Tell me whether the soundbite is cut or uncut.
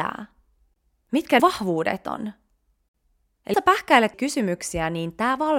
cut